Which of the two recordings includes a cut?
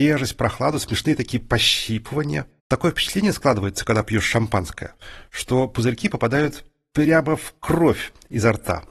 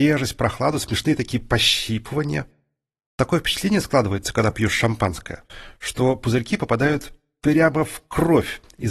first; 1 cut; at 2.6 s

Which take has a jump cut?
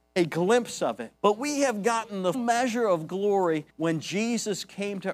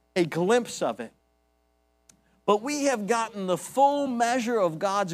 first; 4 cuts; at 1.2 s, 2.3 s, 3.1 s, 3.7 s

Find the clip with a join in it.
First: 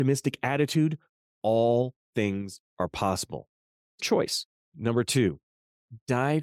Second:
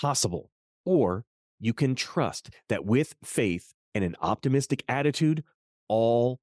first; 2 cuts; at 4.0 s, 4.6 s

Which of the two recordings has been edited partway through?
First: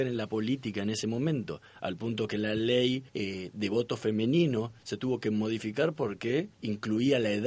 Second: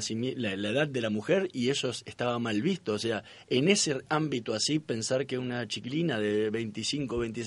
first; 2 cuts; at 3.1 s, 6.5 s

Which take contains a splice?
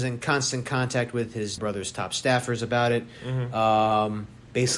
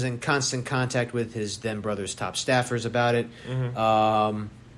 first; 1 cut; at 1.6 s

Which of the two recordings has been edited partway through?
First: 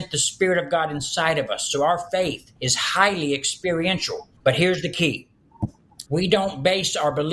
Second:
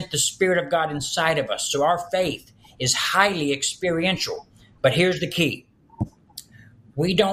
first; 3 cuts; at 2.6 s, 4.4 s, 6.1 s

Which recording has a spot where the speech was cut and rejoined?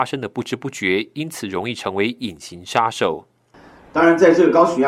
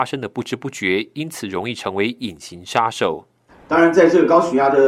second; 1 cut; at 3.5 s

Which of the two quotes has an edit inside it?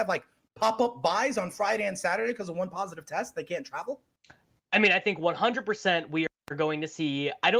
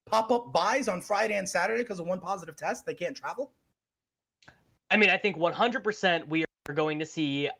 first; 1 cut; at 4.2 s

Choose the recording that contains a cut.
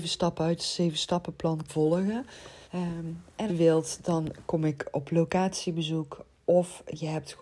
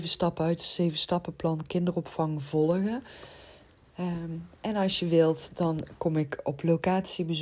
first; 3 cuts; at 1.7 s, 2.6 s, 3.5 s

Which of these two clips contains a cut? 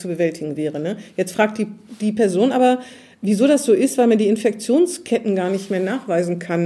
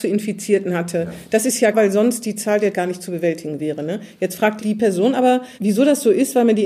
second; 4 cuts; at 1.7 s, 2.7 s, 4.6 s, 5.6 s

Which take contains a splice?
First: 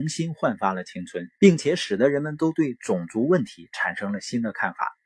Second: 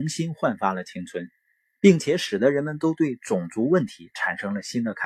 first; 1 cut; at 1.3 s

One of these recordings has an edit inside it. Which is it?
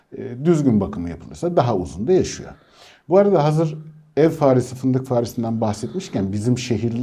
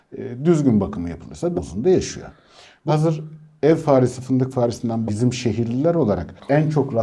second; 3 cuts; at 1.5 s, 2.9 s, 5.1 s

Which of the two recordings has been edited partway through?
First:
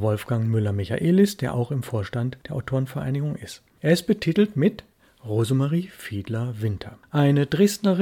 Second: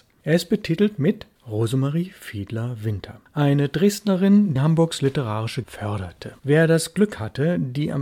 second; 4 cuts; at 1.4 s, 4.6 s, 5.6 s, 6.4 s

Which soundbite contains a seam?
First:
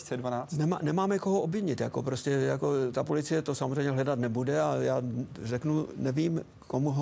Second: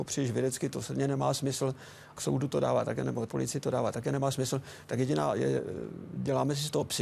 second; 2 cuts; at 2.2 s, 3.3 s

